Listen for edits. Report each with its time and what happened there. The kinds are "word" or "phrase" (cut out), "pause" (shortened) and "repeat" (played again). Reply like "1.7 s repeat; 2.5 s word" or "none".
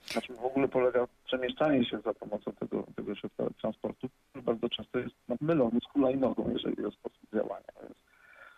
5.4 s word; 6.8 s word